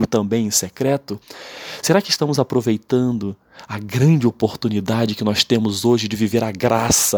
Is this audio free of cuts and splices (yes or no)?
yes